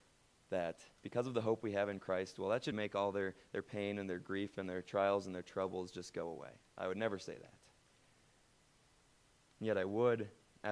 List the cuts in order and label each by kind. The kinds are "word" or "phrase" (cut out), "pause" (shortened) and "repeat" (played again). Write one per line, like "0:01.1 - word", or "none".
0:01.0 - pause
0:02.7 - word